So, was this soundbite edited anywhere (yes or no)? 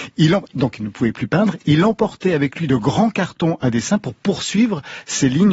no